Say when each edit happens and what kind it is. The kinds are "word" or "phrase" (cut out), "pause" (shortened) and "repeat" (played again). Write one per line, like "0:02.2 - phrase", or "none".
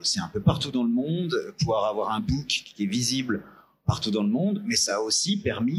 none

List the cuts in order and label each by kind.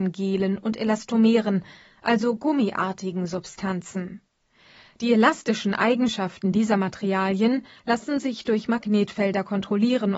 none

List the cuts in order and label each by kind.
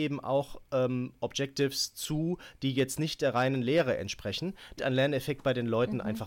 0:04.8 - word

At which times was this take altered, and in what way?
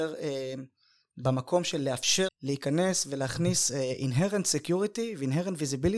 0:02.3 - word

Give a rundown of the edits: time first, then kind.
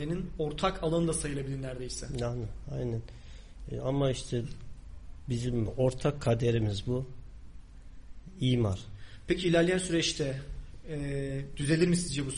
0:05.7 - word

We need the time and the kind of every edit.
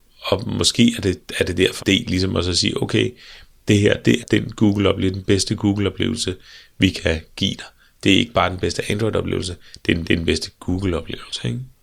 0:01.8 - phrase
0:04.2 - word
0:10.0 - repeat

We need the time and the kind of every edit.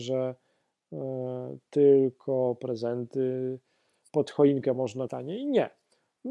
0:05.1 - phrase

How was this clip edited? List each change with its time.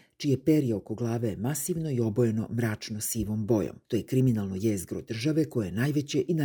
0:03.8 - pause

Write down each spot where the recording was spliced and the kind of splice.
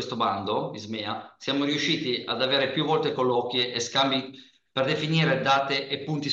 none

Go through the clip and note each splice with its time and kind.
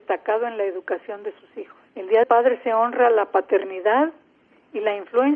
0:01.9 - pause
0:02.2 - word

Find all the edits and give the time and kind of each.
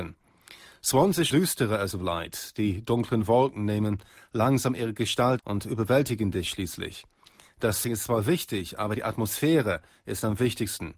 0:01.3 - word
0:01.9 - word
0:05.4 - word
0:07.8 - word

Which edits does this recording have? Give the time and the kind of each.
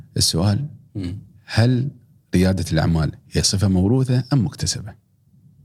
none

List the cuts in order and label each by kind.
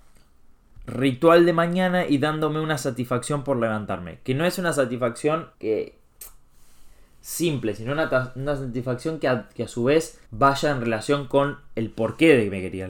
0:05.5 - pause
0:10.2 - pause

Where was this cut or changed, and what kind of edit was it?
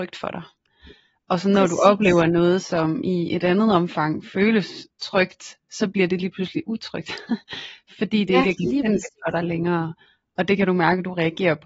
none

